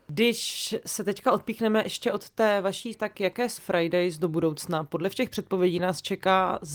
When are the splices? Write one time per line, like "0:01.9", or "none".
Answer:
0:02.9
0:03.6